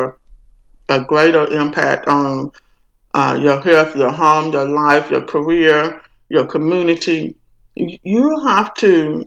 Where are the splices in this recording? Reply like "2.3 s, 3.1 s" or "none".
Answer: none